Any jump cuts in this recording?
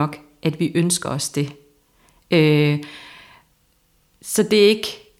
no; 0 cuts

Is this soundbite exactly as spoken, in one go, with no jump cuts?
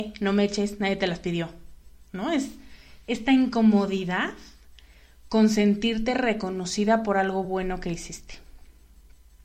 yes; 0 cuts

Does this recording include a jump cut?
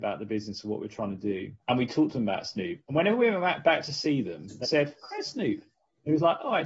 yes; 2 cuts; at 1.6 s, 4.6 s

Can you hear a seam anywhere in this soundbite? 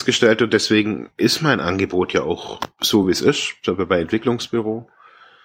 no; 0 cuts

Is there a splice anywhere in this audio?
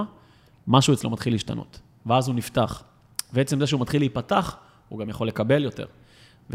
no; 0 cuts

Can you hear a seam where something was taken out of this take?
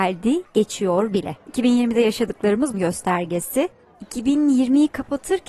yes; 2 cuts; at 1.4 s, 2.7 s

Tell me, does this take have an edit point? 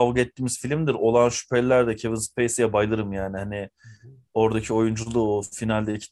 no; 0 cuts

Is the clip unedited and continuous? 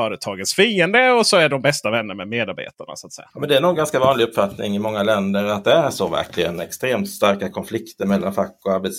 yes; 0 cuts

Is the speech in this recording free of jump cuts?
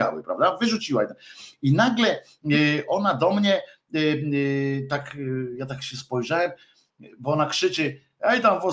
yes; 0 cuts

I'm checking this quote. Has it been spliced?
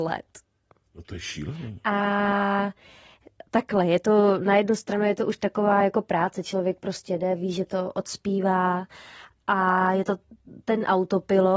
no; 0 cuts

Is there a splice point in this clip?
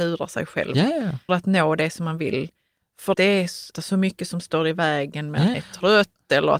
yes; 4 cuts; at 1.3 s, 3.1 s, 3.7 s, 5.5 s

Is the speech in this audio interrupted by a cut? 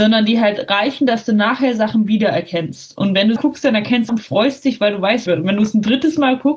yes; 3 cuts; at 3.4 s, 4.1 s, 5.3 s

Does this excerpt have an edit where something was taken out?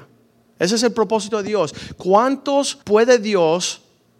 yes; 1 cut; at 2.8 s

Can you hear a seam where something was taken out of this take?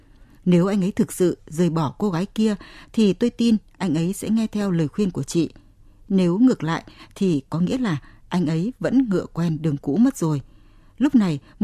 no; 0 cuts

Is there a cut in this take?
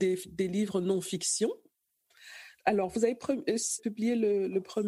yes; 1 cut; at 3.8 s

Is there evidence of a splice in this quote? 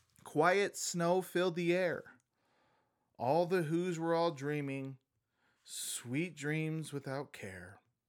no; 0 cuts

